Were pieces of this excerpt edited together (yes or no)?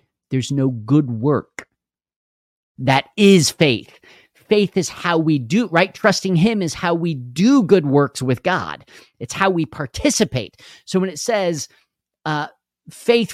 no